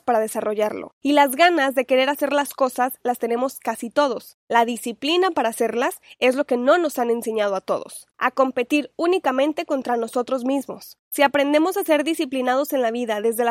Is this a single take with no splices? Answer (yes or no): no